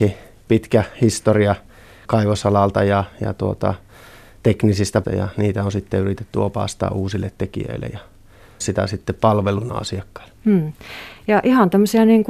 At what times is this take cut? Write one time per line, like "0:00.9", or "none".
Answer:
0:02.0
0:05.0
0:08.6
0:10.4